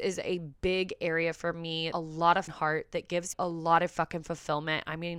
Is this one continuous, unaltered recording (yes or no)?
no